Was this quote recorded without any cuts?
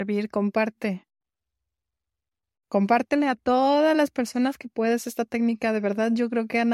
yes; 0 cuts

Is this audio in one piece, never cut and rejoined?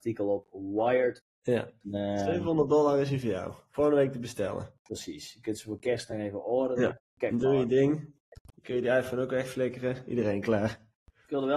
yes; 0 cuts

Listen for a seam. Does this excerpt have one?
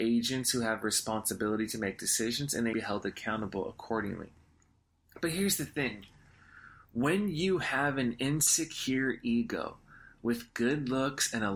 yes; 1 cut; at 2.7 s

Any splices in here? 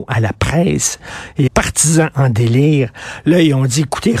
yes; 1 cut; at 1.5 s

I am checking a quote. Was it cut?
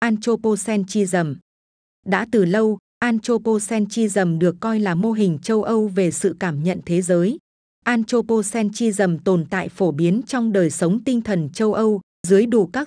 no; 0 cuts

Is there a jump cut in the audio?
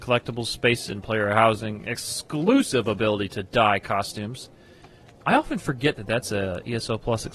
no; 0 cuts

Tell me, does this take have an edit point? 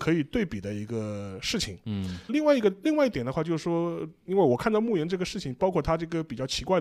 yes; 1 cut; at 2.3 s

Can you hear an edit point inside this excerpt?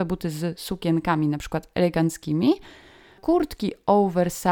no; 0 cuts

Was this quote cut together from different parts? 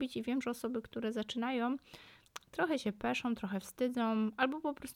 no; 0 cuts

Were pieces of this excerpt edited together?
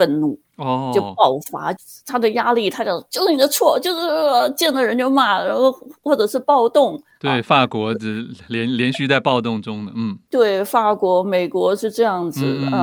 no; 0 cuts

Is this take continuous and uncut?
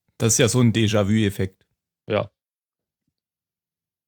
yes; 0 cuts

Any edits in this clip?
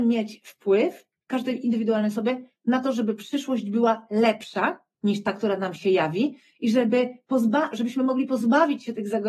no; 0 cuts

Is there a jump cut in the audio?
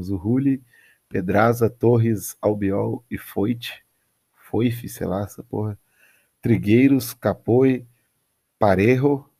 no; 0 cuts

